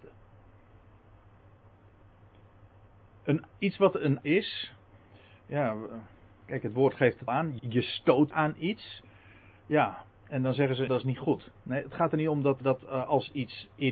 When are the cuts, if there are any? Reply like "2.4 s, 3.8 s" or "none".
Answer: 4.2 s, 7.3 s, 7.6 s, 8.3 s, 10.9 s, 12.6 s